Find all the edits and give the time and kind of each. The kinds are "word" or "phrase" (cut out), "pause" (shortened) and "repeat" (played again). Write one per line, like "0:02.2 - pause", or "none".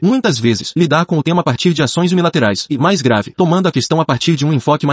none